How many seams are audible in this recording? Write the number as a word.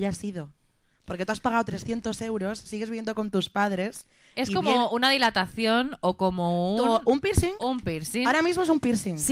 zero